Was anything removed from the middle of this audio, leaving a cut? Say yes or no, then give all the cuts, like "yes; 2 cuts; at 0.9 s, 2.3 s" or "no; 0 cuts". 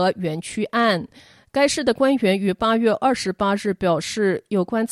no; 0 cuts